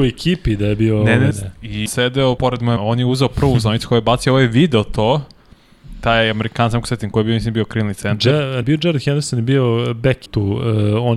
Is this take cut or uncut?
cut